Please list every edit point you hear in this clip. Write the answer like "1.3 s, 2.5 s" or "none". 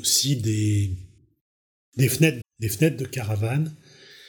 2.4 s